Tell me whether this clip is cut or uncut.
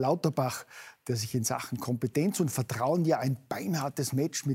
uncut